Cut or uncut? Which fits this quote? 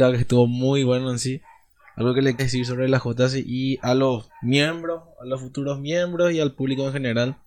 cut